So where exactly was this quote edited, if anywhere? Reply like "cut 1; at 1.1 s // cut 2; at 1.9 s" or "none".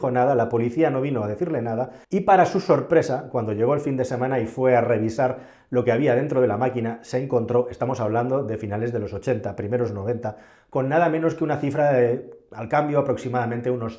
cut 1; at 2.0 s